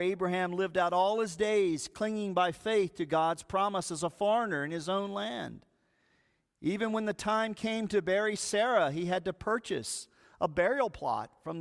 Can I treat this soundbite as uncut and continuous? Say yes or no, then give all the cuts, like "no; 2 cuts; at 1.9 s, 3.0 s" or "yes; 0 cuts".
yes; 0 cuts